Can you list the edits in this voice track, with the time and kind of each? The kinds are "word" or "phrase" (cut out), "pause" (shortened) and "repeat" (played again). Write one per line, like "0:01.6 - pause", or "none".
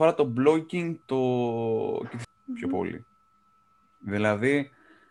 0:01.0 - word
0:02.2 - word